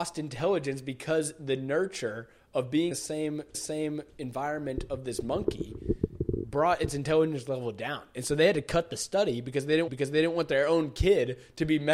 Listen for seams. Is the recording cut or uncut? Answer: cut